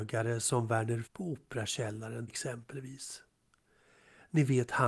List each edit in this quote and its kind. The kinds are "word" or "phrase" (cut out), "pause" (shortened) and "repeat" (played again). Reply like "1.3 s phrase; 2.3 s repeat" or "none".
1.0 s word; 2.3 s word